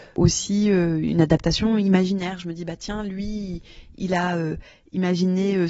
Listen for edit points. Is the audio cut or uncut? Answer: uncut